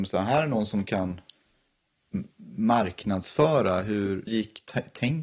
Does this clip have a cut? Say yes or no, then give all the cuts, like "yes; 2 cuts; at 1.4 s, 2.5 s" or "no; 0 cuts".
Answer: yes; 1 cut; at 4.3 s